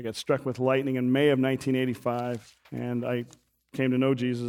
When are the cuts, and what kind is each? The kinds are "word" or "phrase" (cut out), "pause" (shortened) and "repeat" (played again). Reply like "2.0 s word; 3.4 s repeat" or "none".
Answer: 2.6 s pause